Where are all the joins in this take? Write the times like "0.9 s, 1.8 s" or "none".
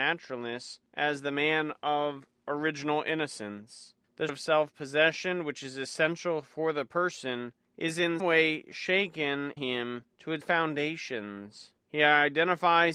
4.3 s, 8.2 s, 9.6 s, 10.4 s